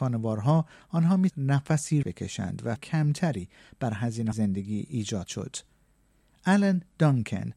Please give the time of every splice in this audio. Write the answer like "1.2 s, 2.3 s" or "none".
1.3 s, 2.0 s, 2.8 s, 4.3 s, 5.3 s